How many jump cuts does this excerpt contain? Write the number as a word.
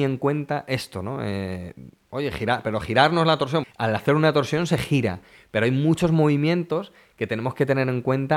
one